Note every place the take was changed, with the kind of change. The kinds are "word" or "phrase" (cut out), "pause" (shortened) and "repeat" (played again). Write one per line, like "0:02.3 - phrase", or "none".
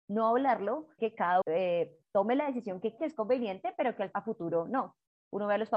0:01.0 - word
0:01.4 - word
0:02.0 - pause
0:03.0 - word
0:04.1 - word